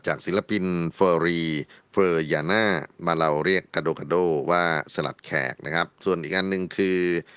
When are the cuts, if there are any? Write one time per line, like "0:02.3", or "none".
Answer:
0:02.9